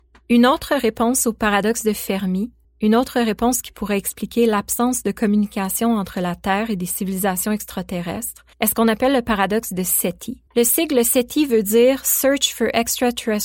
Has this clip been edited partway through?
yes; 3 cuts; at 2.6 s, 8.5 s, 10.5 s

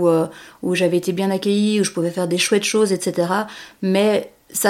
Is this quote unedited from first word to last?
yes; 0 cuts

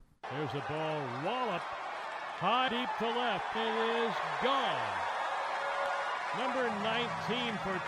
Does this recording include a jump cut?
yes; 2 cuts; at 2.7 s, 3.5 s

